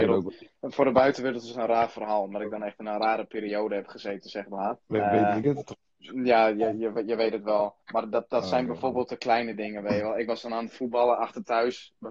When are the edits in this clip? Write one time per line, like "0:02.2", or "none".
0:04.8
0:07.8